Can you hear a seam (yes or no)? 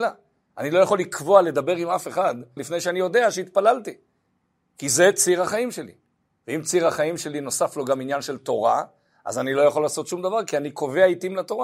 yes